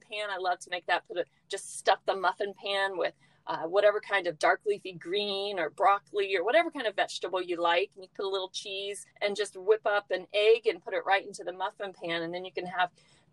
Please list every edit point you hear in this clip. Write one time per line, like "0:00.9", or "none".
0:09.1